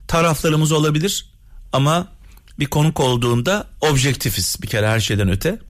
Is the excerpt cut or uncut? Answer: uncut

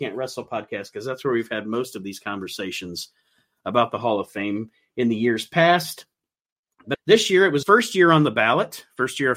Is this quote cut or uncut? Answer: cut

